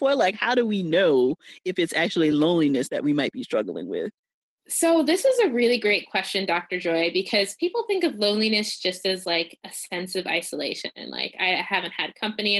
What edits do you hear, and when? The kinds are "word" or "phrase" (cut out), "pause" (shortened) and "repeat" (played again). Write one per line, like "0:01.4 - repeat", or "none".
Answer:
none